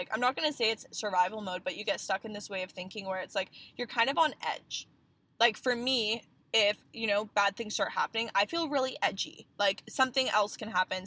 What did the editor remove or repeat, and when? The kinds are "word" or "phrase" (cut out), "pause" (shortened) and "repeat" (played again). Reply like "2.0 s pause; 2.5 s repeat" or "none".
none